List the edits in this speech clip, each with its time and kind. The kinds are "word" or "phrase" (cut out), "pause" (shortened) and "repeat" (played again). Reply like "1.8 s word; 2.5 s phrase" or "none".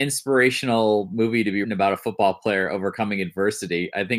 1.6 s word